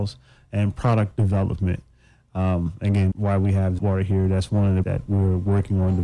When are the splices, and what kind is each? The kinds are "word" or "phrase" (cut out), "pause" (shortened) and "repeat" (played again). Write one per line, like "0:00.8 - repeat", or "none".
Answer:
0:03.1 - word
0:03.8 - word
0:04.8 - word

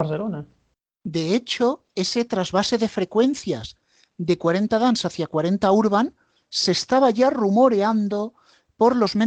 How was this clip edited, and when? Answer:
0:01.9 - pause

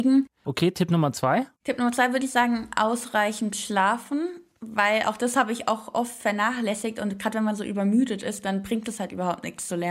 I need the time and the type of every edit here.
0:01.5 - pause

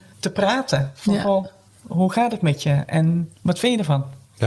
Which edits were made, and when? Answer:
0:03.3 - pause

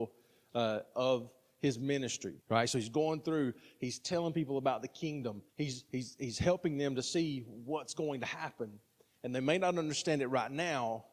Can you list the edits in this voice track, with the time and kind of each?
0:02.4 - pause
0:05.5 - pause

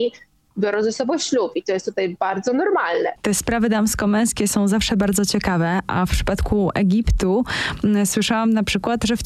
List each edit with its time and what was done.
none

